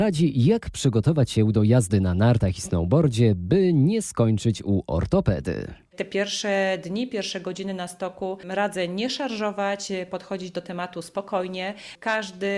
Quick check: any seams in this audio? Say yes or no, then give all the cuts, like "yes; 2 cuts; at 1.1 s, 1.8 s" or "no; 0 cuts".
no; 0 cuts